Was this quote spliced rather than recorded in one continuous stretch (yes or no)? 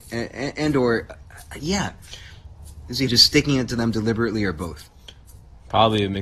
yes